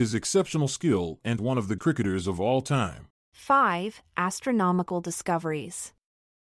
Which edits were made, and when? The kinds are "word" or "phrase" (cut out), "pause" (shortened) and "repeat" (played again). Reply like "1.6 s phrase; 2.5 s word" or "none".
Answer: 1.4 s phrase; 1.8 s word; 3.2 s pause